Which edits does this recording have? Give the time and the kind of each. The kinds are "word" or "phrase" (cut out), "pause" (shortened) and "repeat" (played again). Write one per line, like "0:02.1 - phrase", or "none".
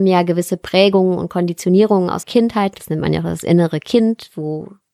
0:02.2 - word